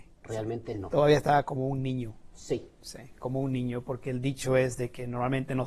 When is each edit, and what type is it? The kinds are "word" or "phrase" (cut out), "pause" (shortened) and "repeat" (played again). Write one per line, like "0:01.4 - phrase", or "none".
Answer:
none